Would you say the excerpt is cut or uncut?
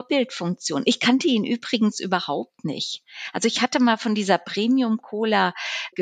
uncut